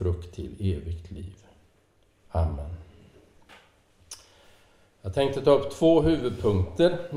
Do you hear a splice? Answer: no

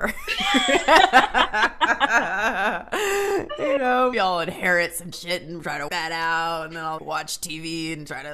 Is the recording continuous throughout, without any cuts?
no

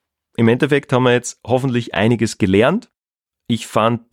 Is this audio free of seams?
yes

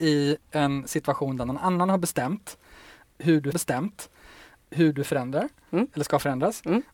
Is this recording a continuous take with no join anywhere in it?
no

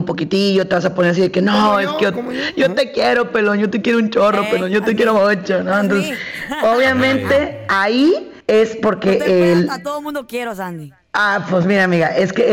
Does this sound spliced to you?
yes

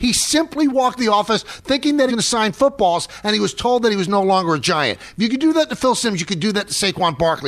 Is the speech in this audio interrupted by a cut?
yes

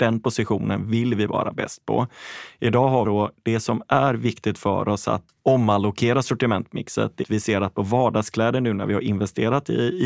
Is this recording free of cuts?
no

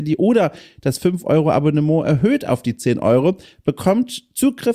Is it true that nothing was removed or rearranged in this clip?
yes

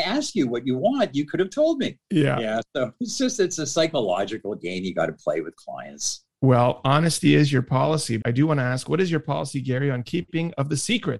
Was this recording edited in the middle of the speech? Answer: yes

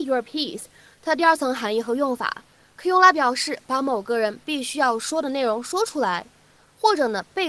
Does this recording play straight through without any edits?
yes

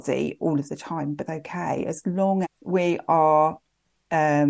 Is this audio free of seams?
no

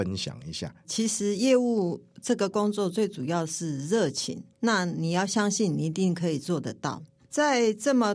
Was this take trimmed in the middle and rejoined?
yes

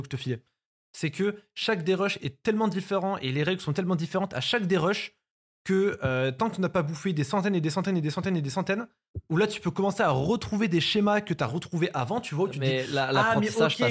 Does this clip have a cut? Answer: no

